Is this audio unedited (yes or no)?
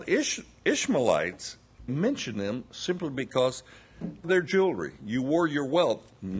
no